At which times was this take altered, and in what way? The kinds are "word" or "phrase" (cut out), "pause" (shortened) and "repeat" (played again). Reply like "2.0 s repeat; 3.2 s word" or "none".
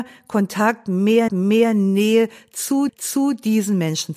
1.3 s repeat; 2.9 s repeat